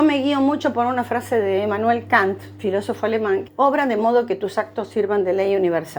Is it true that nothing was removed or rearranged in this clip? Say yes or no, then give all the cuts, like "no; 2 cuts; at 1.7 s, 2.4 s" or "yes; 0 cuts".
no; 1 cut; at 3.5 s